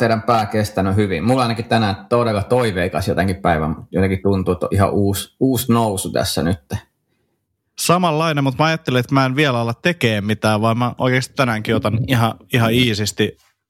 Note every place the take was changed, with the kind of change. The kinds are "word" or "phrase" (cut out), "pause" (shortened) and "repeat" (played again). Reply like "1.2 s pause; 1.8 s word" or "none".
none